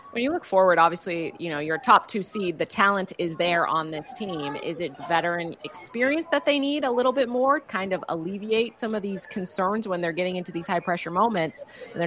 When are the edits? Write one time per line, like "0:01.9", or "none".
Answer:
0:04.9
0:07.6

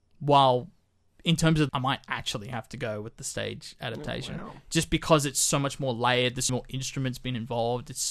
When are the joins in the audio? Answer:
0:01.7
0:06.5

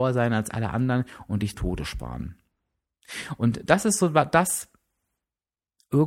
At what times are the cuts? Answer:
0:01.5

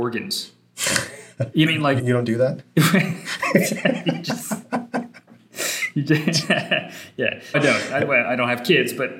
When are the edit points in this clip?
0:01.7
0:02.0
0:07.5

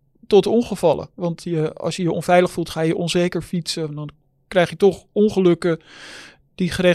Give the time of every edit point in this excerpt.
none

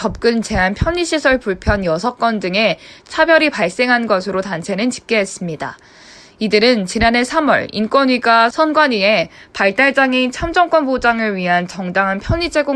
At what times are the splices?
none

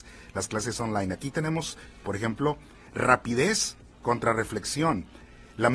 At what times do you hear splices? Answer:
0:02.0

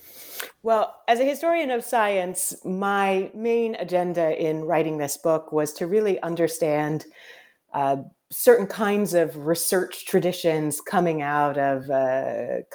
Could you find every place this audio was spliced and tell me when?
none

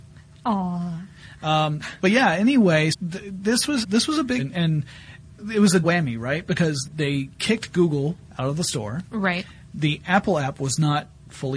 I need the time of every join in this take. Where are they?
0:02.9
0:03.8
0:04.4
0:05.4
0:05.8
0:06.8

